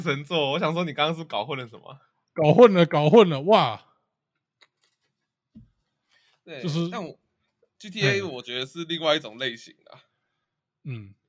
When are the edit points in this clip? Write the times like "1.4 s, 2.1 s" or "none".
none